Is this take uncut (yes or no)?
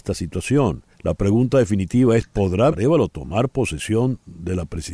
no